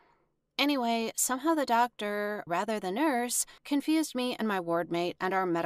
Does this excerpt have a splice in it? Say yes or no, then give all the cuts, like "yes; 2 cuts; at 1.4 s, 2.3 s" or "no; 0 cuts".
yes; 2 cuts; at 2.5 s, 3.6 s